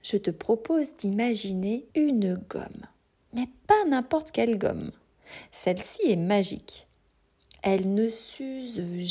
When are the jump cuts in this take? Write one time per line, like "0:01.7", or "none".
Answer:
0:01.9